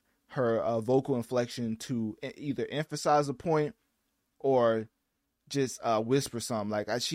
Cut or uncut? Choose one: uncut